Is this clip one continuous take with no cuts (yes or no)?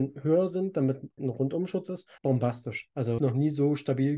no